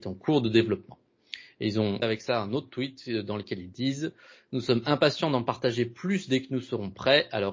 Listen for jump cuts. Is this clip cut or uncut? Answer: cut